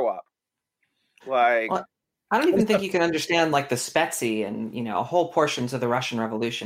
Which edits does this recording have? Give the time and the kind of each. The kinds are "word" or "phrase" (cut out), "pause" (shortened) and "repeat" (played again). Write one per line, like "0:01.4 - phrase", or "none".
none